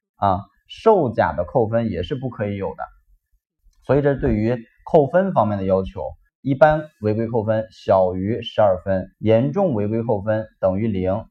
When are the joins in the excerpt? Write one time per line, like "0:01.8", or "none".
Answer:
0:09.1